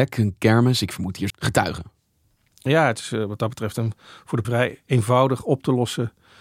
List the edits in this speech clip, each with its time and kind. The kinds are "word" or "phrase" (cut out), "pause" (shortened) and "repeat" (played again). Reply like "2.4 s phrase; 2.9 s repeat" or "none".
1.3 s word; 4.4 s word